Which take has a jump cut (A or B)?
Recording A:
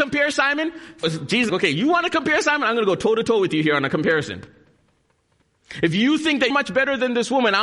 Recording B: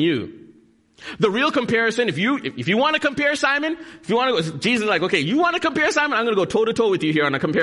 A